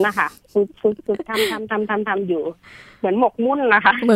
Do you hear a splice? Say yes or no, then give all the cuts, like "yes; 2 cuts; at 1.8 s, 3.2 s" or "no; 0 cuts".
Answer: no; 0 cuts